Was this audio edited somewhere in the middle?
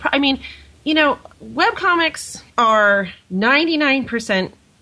yes; 2 cuts; at 1.3 s, 2.5 s

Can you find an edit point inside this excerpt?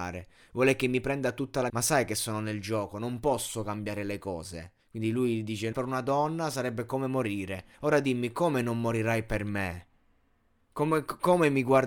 yes; 4 cuts; at 1.7 s, 4.8 s, 5.7 s, 7.7 s

